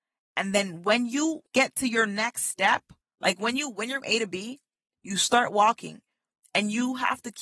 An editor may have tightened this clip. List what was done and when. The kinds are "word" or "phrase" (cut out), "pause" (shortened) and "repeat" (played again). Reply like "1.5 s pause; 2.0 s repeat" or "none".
3.0 s pause; 4.0 s phrase